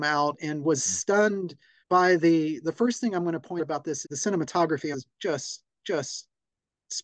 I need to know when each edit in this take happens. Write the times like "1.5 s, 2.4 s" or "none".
1.8 s, 3.6 s, 4.0 s, 4.9 s, 5.8 s